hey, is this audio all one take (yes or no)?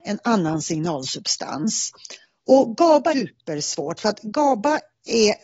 no